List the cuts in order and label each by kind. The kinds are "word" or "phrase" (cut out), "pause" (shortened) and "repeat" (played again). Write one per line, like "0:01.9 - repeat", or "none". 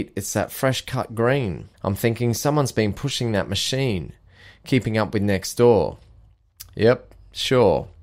0:01.7 - pause